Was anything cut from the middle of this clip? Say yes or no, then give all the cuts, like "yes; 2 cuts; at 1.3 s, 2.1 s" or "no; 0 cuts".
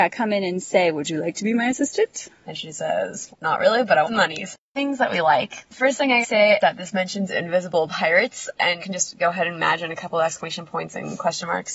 yes; 5 cuts; at 3.3 s, 4.0 s, 6.2 s, 6.6 s, 8.8 s